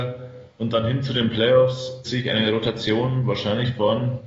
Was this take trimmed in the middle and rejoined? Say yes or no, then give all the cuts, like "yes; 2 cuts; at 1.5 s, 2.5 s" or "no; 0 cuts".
yes; 1 cut; at 2.0 s